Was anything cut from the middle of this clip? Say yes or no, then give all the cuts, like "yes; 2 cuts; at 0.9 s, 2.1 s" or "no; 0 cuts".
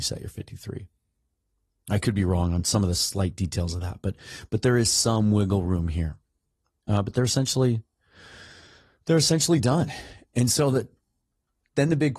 no; 0 cuts